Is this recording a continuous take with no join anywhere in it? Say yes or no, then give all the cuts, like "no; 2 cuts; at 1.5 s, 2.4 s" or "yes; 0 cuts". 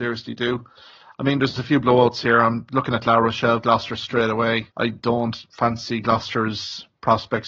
no; 1 cut; at 4.7 s